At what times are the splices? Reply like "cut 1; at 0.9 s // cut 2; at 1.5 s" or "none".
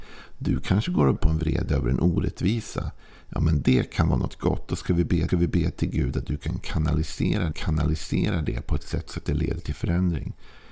cut 1; at 1.2 s // cut 2; at 5.3 s // cut 3; at 7.5 s

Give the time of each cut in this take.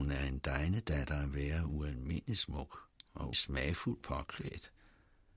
cut 1; at 3.3 s

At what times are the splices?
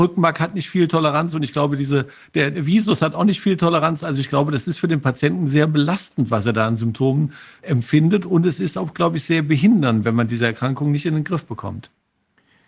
none

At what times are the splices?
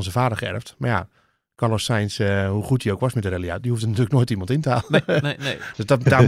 none

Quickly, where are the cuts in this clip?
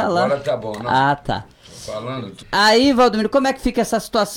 cut 1; at 2.4 s

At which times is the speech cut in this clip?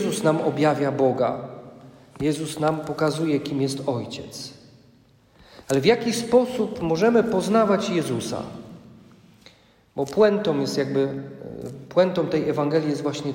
none

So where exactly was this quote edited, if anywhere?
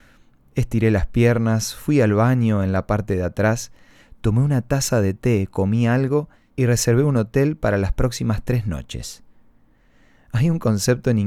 none

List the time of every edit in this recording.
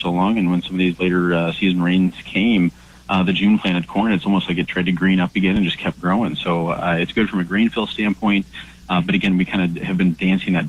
none

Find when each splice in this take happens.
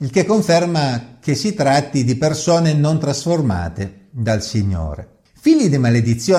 none

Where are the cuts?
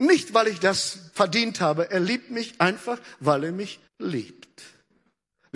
cut 1; at 3.9 s

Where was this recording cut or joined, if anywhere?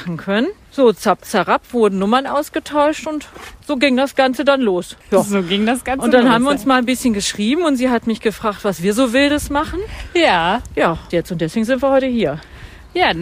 cut 1; at 3.6 s // cut 2; at 5.0 s // cut 3; at 11.1 s

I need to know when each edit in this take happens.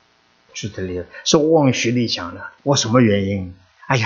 cut 1; at 2.6 s

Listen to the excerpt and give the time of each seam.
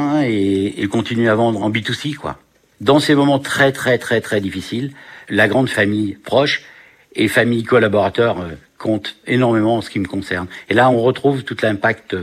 none

